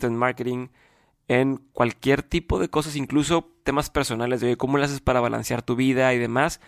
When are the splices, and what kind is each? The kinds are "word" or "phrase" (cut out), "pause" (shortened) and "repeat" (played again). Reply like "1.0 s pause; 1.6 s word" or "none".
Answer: none

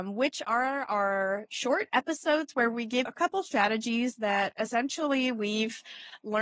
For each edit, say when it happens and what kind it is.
3.1 s word

